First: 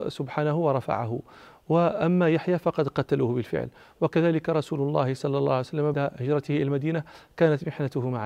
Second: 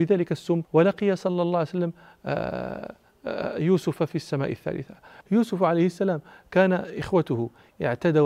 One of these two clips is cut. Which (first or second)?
first